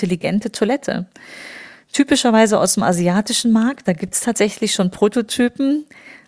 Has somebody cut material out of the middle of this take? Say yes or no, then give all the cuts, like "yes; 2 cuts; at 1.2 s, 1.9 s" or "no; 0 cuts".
no; 0 cuts